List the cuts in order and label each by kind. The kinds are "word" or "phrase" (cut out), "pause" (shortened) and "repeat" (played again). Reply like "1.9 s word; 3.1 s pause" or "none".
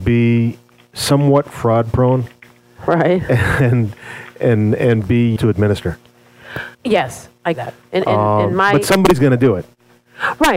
5.4 s phrase; 6.7 s pause; 7.5 s phrase